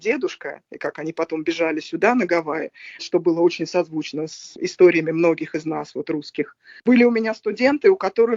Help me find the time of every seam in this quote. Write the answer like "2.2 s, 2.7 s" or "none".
3.0 s